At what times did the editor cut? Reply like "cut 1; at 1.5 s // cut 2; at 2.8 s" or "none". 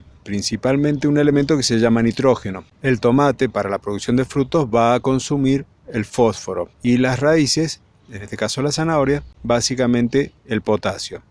cut 1; at 2.7 s // cut 2; at 6.7 s // cut 3; at 9.3 s